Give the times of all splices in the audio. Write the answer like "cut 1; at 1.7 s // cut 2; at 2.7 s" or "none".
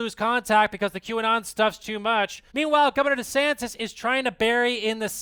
cut 1; at 1.8 s // cut 2; at 2.5 s